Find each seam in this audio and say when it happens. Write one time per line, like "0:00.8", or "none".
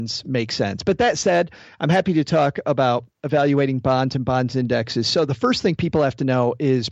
none